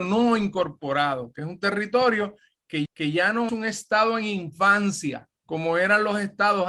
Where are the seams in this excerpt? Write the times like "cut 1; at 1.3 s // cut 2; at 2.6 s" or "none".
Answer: cut 1; at 2.8 s // cut 2; at 3.5 s // cut 3; at 5.3 s